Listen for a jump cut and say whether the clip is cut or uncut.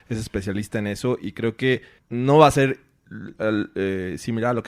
cut